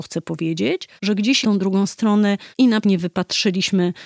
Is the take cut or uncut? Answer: cut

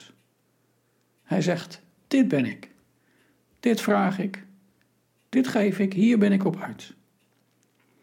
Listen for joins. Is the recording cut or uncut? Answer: uncut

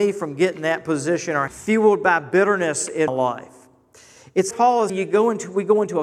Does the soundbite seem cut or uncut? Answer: cut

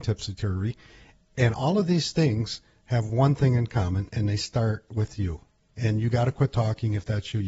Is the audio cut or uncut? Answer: uncut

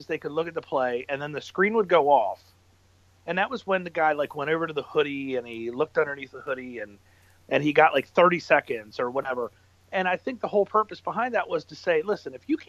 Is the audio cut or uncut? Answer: uncut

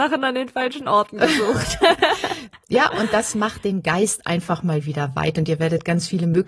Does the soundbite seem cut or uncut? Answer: uncut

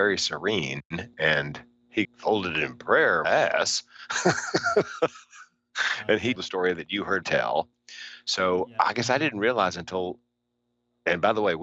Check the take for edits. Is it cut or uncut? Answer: cut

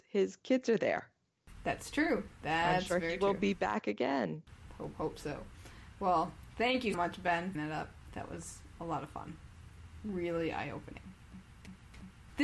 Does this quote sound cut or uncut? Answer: cut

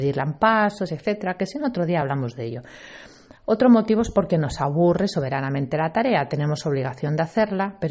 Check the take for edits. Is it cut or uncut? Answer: uncut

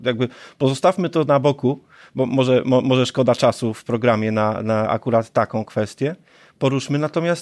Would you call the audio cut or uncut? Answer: uncut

